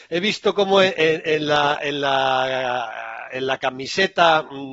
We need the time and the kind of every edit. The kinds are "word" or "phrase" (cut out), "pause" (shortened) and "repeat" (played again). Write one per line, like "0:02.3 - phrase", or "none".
none